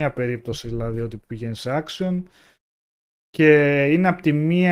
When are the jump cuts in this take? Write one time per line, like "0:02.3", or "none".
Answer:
none